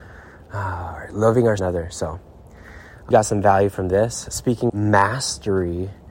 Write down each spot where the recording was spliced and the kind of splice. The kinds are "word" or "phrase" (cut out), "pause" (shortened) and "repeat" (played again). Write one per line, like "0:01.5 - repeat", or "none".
0:01.6 - word
0:03.1 - word
0:04.7 - word

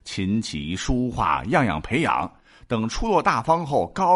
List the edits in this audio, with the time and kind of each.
none

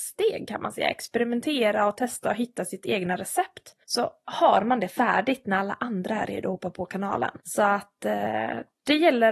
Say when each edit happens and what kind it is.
0:03.8 - pause
0:07.4 - pause

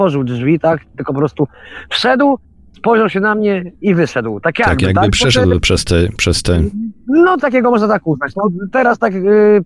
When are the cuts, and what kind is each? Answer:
0:07.4 - word

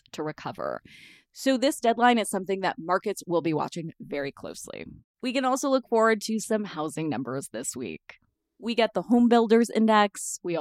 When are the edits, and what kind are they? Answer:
none

